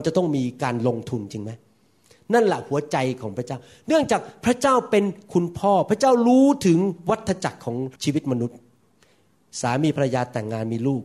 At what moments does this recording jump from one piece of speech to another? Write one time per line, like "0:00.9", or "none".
0:08.0